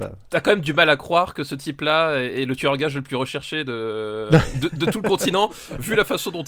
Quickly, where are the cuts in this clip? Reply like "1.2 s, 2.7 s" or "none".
none